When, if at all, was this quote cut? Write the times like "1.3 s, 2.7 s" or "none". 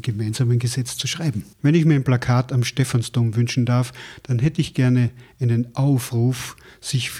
1.5 s